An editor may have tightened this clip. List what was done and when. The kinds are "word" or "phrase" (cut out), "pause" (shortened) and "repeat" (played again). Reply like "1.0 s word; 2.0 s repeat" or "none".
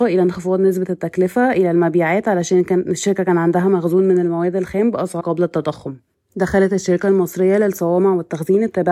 5.2 s word; 6.1 s pause